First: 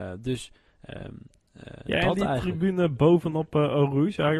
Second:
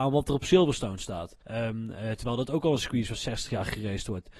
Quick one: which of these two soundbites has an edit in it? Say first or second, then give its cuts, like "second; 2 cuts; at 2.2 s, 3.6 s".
second; 1 cut; at 1.4 s